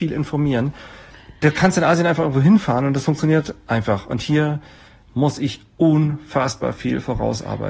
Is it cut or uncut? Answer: uncut